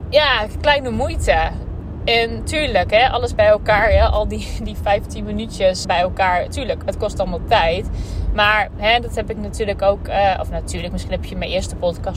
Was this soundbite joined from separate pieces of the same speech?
yes; 1 cut; at 5.8 s

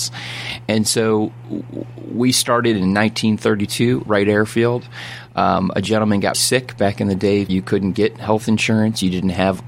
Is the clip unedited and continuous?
no; 3 cuts; at 4.1 s, 6.3 s, 7.5 s

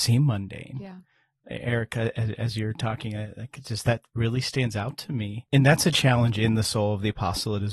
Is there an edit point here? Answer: no; 0 cuts

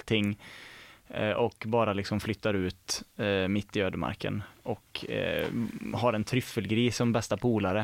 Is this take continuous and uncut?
yes; 0 cuts

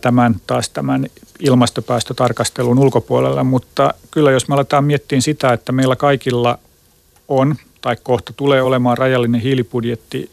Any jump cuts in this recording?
no; 0 cuts

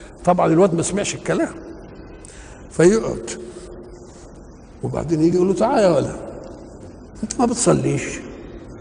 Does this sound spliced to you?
no; 0 cuts

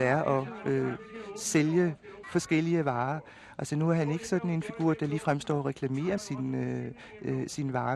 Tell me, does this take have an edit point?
yes; 2 cuts; at 2.2 s, 6.2 s

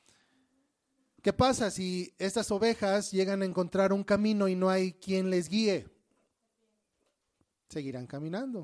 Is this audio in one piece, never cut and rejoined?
yes; 0 cuts

